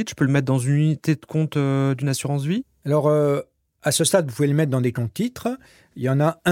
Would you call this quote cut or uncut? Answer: uncut